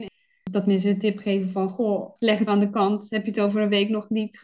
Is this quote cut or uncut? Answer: cut